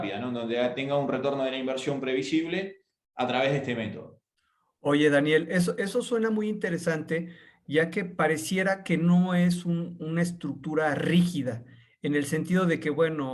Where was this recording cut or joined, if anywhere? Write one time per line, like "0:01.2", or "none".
none